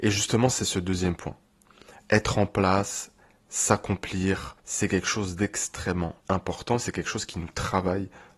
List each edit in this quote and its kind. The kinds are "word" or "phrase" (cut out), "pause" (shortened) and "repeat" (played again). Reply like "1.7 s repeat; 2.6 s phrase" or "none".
4.6 s pause; 6.2 s pause